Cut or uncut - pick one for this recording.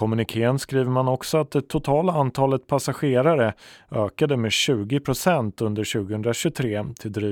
uncut